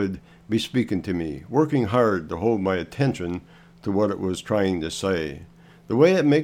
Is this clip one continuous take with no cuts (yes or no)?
yes